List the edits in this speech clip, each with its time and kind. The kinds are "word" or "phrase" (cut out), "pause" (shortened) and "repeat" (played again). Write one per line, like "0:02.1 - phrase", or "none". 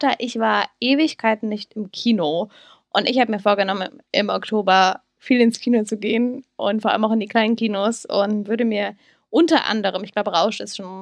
0:08.4 - word